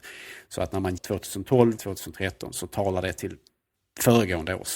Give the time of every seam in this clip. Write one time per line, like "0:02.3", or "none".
0:01.0
0:01.8
0:02.5